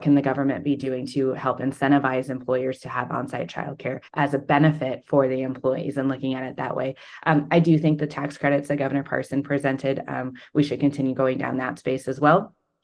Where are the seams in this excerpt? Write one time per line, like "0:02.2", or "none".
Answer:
0:04.1